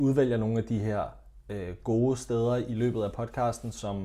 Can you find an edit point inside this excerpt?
no; 0 cuts

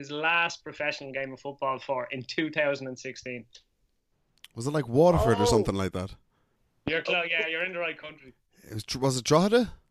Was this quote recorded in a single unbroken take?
yes; 0 cuts

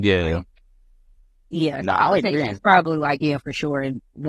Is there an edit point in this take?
no; 0 cuts

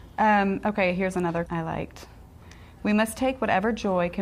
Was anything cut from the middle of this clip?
yes; 1 cut; at 1.5 s

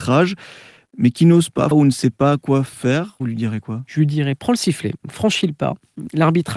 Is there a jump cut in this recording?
yes; 1 cut; at 1.7 s

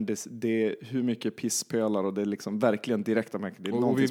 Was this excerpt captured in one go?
yes; 0 cuts

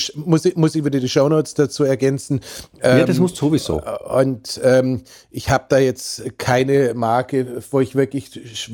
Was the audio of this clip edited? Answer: no; 0 cuts

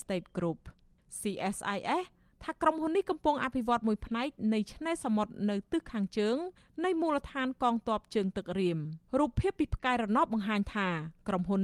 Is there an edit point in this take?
yes; 1 cut; at 9.1 s

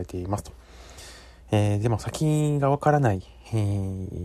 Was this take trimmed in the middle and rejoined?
no; 0 cuts

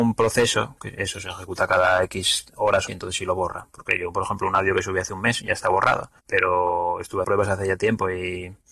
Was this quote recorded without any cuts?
no; 4 cuts; at 2.5 s, 2.9 s, 6.2 s, 7.2 s

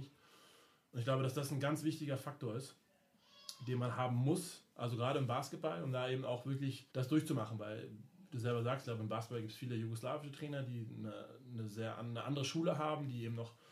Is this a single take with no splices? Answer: no; 2 cuts; at 4.7 s, 6.9 s

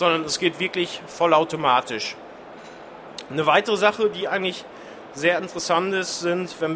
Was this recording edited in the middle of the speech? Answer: no; 0 cuts

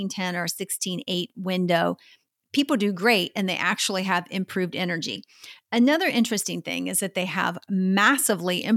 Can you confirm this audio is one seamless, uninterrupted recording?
yes; 0 cuts

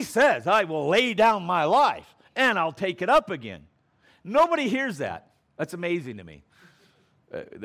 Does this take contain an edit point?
no; 0 cuts

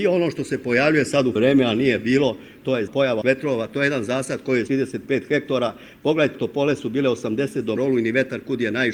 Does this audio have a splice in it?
yes; 6 cuts; at 1.4 s, 2.9 s, 3.2 s, 4.7 s, 6.3 s, 7.8 s

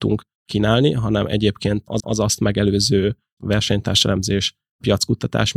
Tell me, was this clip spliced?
yes; 2 cuts; at 2.0 s, 3.4 s

